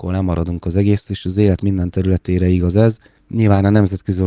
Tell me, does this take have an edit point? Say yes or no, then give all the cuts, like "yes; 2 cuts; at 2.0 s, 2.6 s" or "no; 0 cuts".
no; 0 cuts